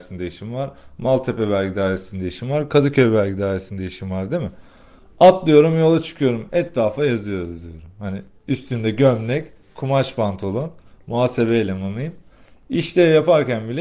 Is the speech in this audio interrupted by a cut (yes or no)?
no